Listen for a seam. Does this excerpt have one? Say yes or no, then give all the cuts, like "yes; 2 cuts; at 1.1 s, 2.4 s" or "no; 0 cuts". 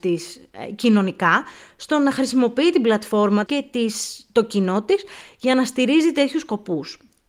yes; 1 cut; at 3.5 s